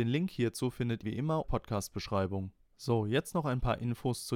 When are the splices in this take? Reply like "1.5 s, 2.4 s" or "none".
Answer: 1.0 s, 1.4 s

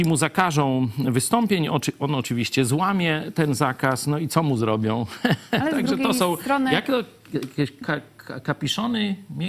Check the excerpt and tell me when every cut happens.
none

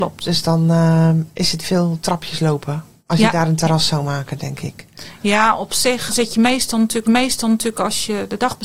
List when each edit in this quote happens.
3.0 s, 6.1 s, 7.0 s

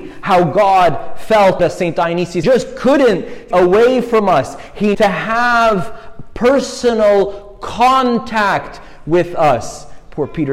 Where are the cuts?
1.6 s, 2.4 s, 3.5 s, 4.9 s

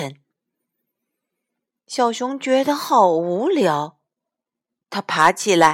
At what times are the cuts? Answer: none

